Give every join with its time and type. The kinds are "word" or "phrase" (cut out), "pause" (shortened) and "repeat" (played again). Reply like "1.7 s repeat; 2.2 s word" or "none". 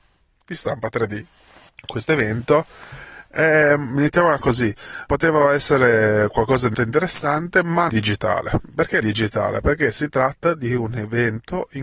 1.7 s pause; 5.1 s word; 6.7 s word; 7.9 s phrase; 9.0 s phrase